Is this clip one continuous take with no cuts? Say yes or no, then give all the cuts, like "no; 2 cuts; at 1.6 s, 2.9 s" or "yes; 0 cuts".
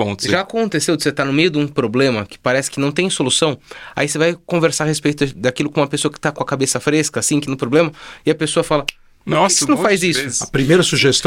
no; 1 cut; at 7.5 s